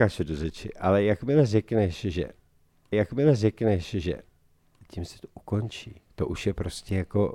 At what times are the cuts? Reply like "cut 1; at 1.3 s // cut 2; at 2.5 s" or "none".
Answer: cut 1; at 2.9 s // cut 2; at 6.1 s